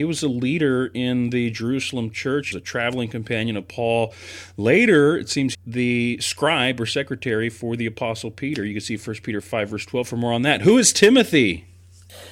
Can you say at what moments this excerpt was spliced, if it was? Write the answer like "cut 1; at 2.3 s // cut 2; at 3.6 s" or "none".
cut 1; at 2.5 s // cut 2; at 5.5 s